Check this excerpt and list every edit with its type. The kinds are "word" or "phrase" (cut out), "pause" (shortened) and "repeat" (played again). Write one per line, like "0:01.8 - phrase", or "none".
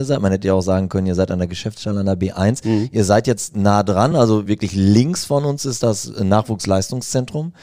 none